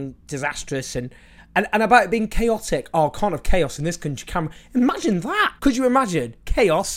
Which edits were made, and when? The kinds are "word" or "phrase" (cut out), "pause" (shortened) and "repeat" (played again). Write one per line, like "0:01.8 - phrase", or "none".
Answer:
0:05.6 - pause